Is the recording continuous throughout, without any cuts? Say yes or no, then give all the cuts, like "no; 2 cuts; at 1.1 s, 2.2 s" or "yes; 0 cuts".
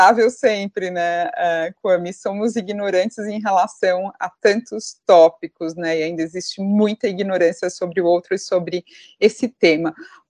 yes; 0 cuts